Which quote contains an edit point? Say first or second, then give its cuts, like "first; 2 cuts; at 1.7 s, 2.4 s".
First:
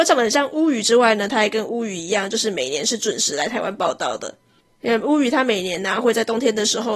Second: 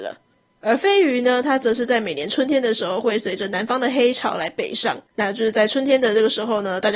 second; 1 cut; at 5.1 s